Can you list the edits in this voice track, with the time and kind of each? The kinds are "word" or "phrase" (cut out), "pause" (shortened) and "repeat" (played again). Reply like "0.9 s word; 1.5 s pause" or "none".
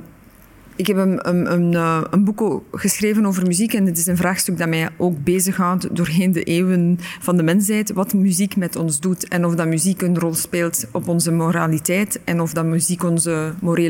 none